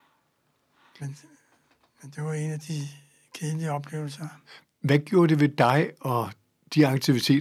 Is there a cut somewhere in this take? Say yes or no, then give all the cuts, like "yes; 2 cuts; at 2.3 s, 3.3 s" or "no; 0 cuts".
no; 0 cuts